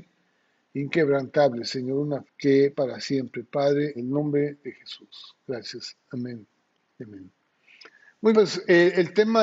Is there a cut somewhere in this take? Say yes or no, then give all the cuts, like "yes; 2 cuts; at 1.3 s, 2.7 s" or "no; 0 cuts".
yes; 4 cuts; at 2.3 s, 2.7 s, 3.9 s, 8.3 s